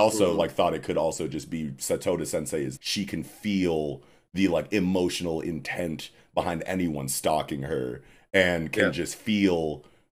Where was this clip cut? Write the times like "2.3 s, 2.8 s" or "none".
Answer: 2.8 s